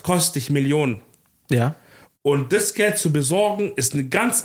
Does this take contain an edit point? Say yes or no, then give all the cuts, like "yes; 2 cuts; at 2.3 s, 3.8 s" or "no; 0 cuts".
no; 0 cuts